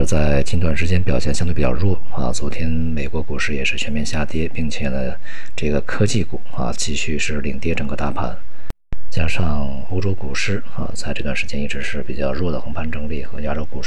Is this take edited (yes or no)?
no